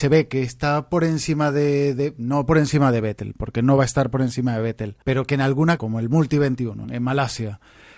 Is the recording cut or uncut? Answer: cut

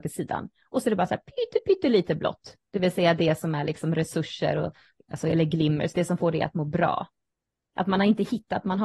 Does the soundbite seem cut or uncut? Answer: uncut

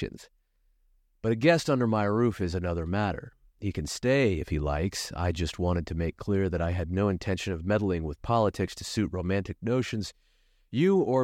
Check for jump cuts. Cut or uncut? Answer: uncut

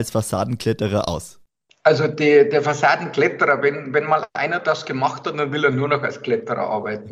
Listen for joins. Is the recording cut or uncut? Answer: uncut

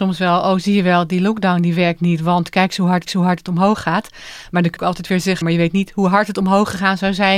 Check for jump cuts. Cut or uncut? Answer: cut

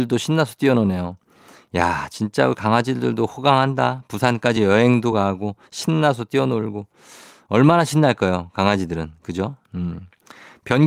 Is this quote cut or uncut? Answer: uncut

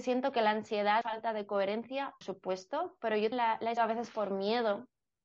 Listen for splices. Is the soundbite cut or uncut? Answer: cut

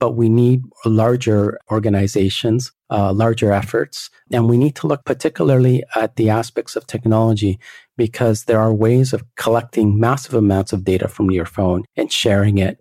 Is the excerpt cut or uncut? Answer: uncut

